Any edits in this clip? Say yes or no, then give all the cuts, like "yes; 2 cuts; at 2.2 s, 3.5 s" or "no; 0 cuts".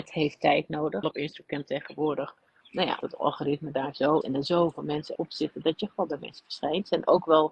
yes; 6 cuts; at 1.0 s, 2.6 s, 3.0 s, 4.2 s, 5.2 s, 6.2 s